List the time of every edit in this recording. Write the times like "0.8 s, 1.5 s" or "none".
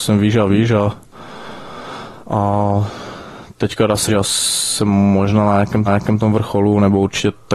2.2 s, 4.1 s, 5.9 s